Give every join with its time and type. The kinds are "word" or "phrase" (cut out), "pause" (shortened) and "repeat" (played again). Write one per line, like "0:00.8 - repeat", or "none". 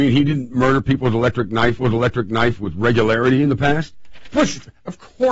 0:01.8 - repeat